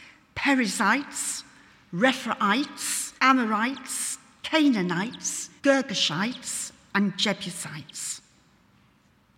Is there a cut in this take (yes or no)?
yes